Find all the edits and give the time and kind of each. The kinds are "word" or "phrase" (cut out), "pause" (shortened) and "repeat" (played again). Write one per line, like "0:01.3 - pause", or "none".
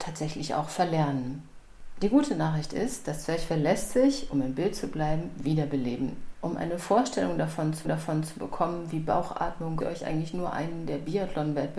0:07.8 - repeat
0:09.8 - phrase